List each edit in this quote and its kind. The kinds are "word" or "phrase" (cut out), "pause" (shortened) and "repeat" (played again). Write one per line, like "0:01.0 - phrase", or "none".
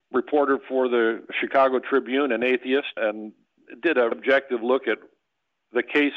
0:04.1 - word